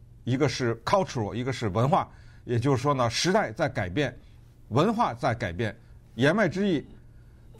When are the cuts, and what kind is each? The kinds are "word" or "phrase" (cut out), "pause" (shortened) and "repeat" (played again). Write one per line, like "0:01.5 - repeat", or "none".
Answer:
none